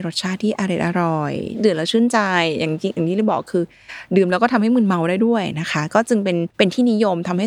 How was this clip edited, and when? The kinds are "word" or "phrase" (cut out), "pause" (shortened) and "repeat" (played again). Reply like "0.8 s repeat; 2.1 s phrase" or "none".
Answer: 6.5 s pause